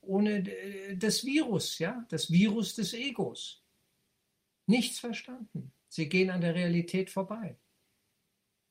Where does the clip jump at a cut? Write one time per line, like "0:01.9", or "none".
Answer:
0:05.8